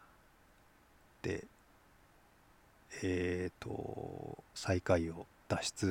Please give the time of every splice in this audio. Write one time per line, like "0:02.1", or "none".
0:04.5